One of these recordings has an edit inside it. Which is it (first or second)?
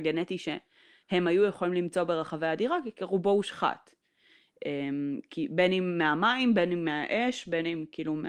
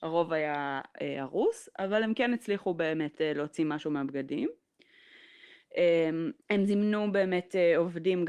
second